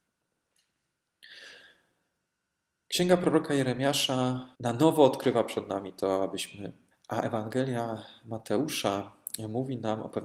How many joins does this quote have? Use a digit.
2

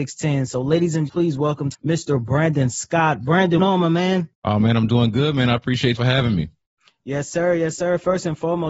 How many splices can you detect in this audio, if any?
4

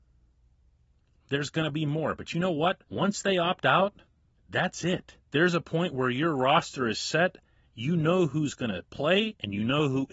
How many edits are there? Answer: 3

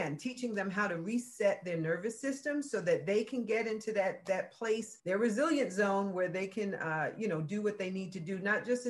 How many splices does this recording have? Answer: 1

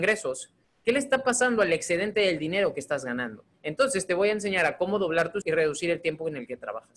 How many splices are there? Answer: 2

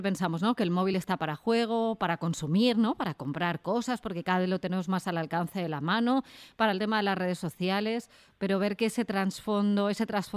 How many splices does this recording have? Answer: 0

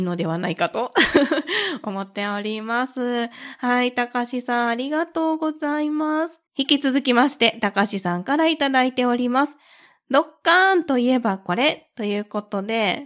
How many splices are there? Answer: 1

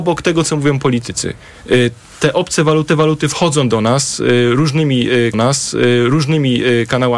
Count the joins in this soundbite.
2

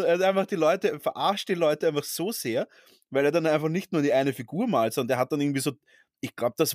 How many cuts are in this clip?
0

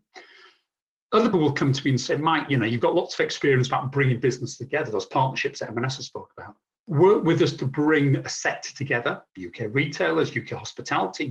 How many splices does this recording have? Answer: 3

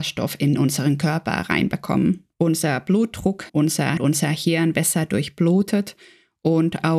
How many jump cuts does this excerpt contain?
4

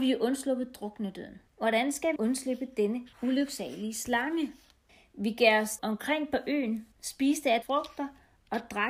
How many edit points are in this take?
7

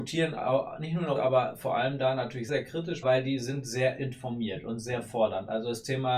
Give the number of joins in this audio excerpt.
3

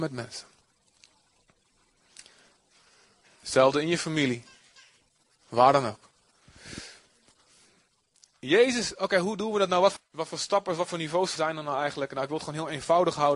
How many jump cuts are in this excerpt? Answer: 2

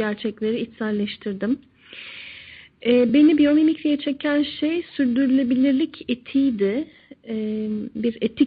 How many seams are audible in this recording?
0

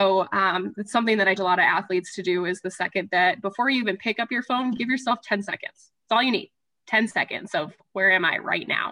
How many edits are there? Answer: 1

